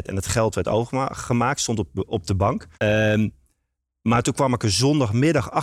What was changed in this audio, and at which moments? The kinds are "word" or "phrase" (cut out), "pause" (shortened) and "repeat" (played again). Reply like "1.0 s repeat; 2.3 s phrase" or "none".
2.1 s word; 2.7 s pause